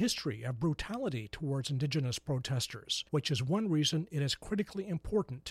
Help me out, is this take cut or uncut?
cut